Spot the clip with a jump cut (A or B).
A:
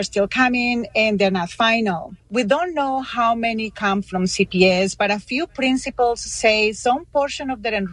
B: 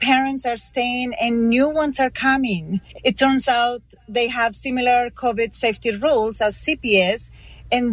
A